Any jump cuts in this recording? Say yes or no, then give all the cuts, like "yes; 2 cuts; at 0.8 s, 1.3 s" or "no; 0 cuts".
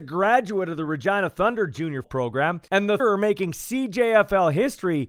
yes; 2 cuts; at 2.0 s, 3.0 s